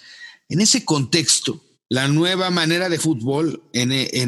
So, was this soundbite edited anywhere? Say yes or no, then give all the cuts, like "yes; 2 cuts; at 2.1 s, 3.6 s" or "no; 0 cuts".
yes; 2 cuts; at 1.7 s, 3.0 s